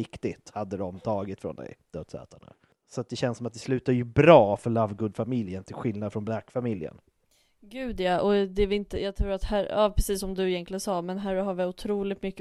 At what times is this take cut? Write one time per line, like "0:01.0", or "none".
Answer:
none